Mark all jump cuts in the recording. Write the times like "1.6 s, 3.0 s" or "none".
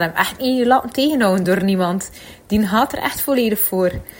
none